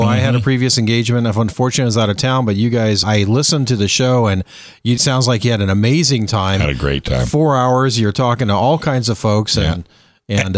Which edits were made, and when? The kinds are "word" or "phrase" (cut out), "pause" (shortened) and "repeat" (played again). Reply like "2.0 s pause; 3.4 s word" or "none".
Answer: 3.0 s word; 5.0 s word